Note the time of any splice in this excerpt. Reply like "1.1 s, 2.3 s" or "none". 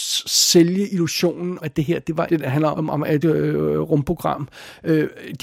1.6 s, 2.3 s, 2.7 s, 3.2 s